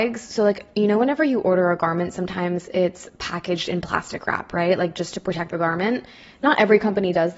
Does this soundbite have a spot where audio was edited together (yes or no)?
no